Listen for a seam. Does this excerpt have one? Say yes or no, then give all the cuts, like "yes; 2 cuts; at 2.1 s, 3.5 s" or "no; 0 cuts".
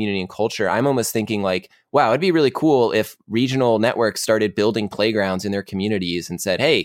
no; 0 cuts